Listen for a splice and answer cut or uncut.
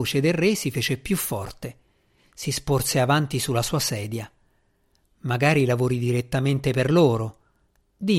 uncut